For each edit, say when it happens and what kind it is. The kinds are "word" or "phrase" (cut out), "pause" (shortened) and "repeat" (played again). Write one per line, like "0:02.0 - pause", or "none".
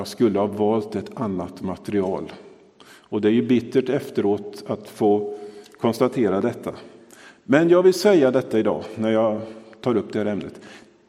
none